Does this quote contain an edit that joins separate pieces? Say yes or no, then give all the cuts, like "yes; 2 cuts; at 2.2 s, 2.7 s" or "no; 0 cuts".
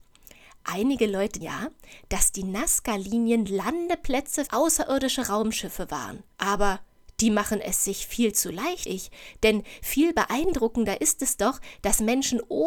yes; 4 cuts; at 1.4 s, 4.5 s, 6.3 s, 8.9 s